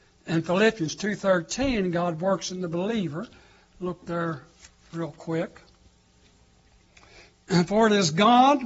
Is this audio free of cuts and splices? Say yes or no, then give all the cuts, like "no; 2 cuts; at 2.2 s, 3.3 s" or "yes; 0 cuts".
yes; 0 cuts